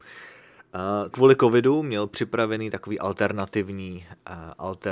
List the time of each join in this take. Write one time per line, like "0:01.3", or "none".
0:01.1